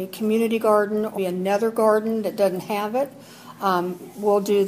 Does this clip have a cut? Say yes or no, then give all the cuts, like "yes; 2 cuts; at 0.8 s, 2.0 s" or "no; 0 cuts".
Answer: yes; 1 cut; at 1.2 s